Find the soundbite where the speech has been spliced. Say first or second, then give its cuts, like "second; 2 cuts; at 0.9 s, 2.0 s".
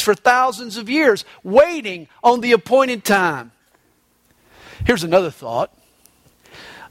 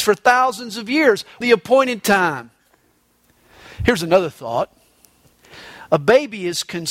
second; 1 cut; at 1.4 s